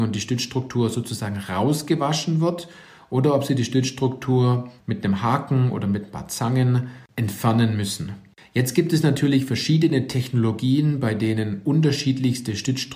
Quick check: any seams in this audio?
no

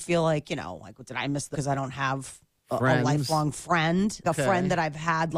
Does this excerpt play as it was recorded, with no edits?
no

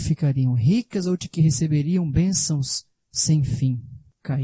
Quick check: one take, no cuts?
yes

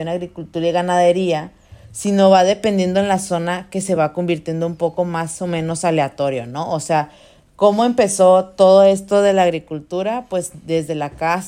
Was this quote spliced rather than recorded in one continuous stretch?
no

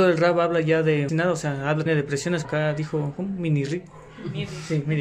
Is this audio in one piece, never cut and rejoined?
no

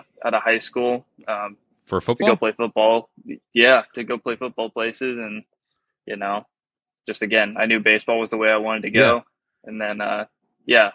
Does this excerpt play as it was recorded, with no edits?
yes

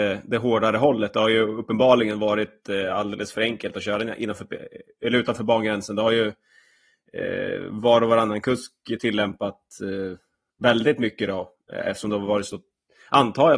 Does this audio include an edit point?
no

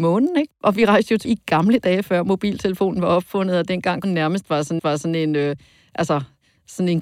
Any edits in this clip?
yes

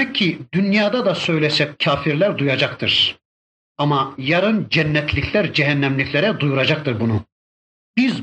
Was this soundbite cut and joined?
yes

